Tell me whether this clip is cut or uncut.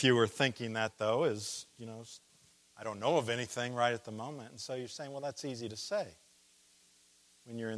cut